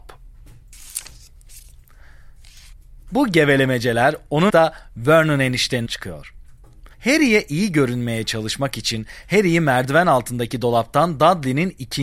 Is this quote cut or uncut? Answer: cut